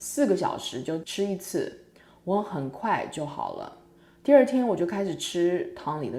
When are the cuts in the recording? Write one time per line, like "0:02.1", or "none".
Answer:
none